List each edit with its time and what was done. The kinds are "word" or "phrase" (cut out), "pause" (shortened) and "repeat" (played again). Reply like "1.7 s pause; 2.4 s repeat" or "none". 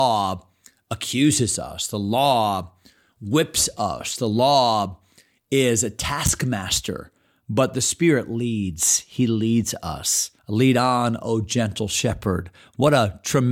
10.4 s pause